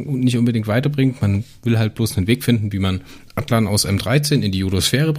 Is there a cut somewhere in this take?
no; 0 cuts

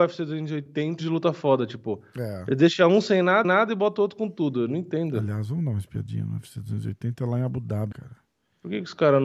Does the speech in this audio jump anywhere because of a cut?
yes; 3 cuts; at 1.0 s, 3.4 s, 7.9 s

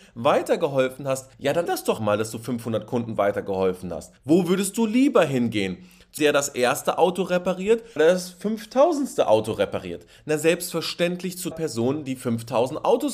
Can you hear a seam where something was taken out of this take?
yes; 7 cuts; at 1.3 s, 1.7 s, 2.0 s, 4.2 s, 6.2 s, 8.0 s, 11.5 s

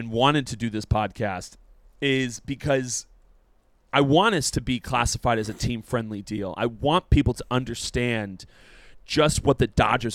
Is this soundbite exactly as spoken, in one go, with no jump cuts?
yes; 0 cuts

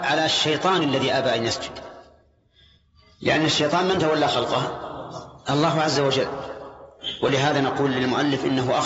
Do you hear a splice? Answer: no; 0 cuts

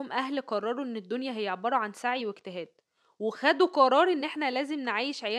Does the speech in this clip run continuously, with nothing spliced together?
yes; 0 cuts

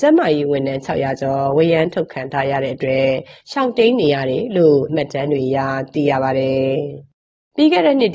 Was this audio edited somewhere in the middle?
yes; 1 cut; at 4.9 s

